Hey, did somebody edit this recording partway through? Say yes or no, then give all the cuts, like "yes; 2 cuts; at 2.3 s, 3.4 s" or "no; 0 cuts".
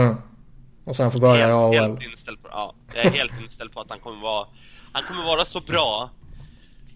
no; 0 cuts